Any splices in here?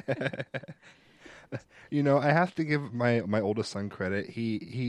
no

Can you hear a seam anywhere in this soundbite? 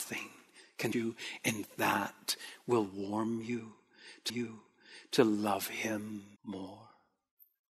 yes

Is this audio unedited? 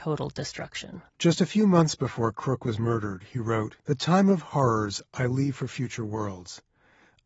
no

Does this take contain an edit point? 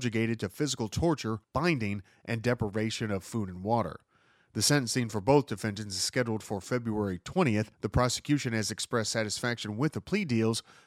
yes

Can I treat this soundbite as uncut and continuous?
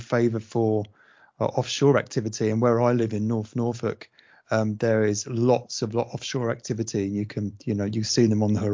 yes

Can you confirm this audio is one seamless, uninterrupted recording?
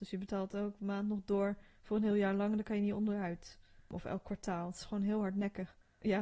yes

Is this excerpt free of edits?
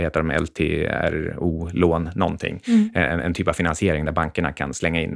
yes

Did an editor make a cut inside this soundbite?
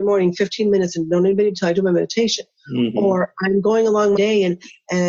yes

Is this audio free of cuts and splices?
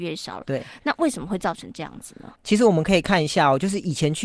no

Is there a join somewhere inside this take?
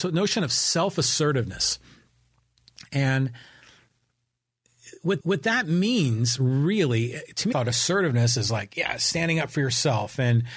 yes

